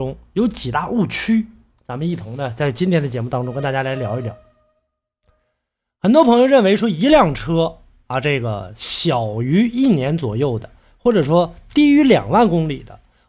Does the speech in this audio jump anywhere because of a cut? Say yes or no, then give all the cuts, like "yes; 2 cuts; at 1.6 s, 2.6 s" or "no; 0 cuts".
no; 0 cuts